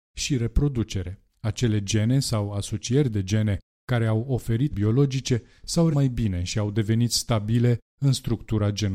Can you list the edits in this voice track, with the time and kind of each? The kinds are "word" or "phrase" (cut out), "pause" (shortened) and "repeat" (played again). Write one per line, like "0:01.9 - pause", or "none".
0:01.3 - pause
0:04.7 - word
0:05.9 - word